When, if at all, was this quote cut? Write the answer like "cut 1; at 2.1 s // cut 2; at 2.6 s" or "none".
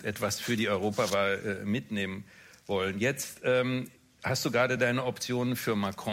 none